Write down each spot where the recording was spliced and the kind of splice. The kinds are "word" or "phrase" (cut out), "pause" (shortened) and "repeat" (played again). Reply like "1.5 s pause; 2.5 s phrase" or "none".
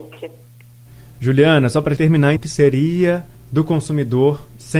2.0 s word; 2.4 s word; 3.3 s pause